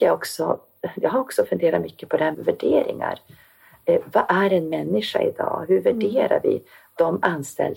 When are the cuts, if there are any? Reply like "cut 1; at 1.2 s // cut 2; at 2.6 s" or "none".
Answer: cut 1; at 2.3 s